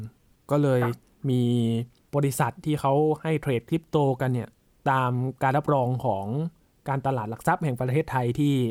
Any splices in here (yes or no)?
no